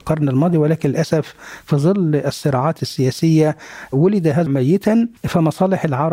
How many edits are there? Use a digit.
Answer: 2